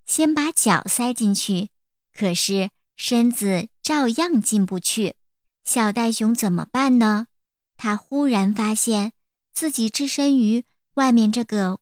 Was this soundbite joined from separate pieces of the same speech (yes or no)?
yes